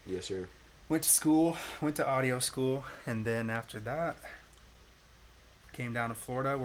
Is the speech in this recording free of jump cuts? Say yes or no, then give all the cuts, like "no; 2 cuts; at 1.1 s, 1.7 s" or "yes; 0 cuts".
yes; 0 cuts